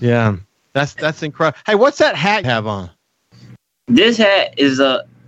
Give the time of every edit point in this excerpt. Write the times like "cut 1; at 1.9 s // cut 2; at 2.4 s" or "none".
cut 1; at 2.4 s